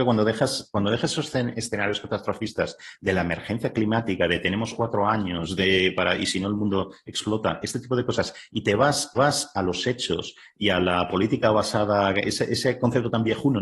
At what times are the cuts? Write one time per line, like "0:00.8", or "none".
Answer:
0:09.1